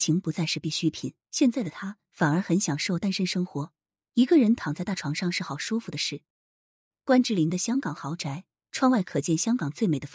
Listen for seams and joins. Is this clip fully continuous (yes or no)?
no